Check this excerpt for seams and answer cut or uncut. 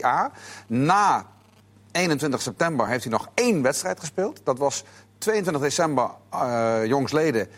uncut